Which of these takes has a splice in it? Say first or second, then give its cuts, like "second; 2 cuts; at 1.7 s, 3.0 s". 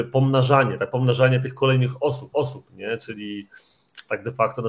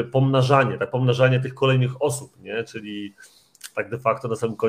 first; 1 cut; at 2.3 s